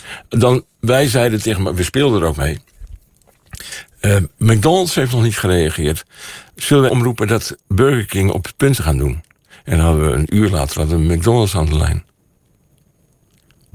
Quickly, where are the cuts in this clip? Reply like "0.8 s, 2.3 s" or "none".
6.9 s, 8.8 s

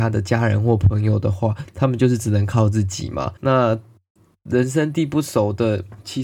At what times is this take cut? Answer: 3.4 s

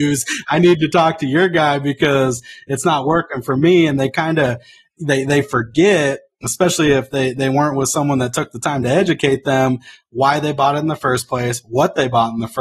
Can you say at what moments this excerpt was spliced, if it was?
none

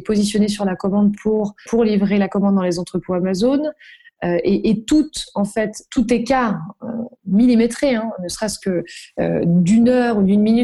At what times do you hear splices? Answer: 1.7 s, 7.2 s

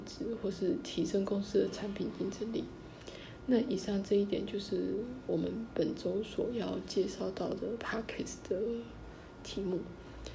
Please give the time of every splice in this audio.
none

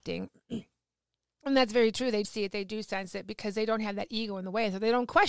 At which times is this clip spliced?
2.2 s

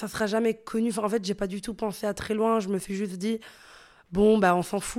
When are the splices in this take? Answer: none

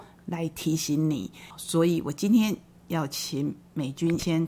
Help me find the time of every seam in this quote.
none

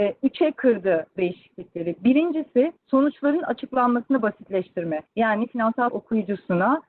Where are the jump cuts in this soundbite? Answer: 1.2 s, 2.8 s, 5.1 s, 5.9 s

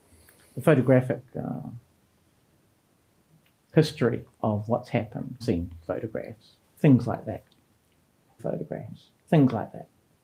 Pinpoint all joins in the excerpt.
4.3 s, 5.4 s, 6.6 s, 8.4 s

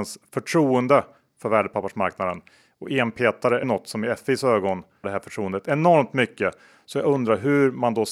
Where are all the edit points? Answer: 3.6 s, 5.0 s

